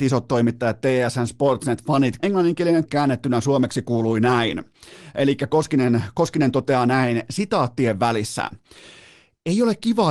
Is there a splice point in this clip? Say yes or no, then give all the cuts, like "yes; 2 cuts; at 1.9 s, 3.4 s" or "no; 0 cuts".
yes; 2 cuts; at 2.2 s, 2.9 s